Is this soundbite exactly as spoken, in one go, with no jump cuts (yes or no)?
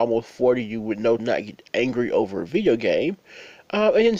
no